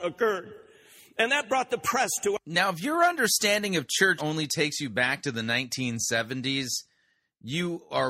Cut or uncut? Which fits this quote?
cut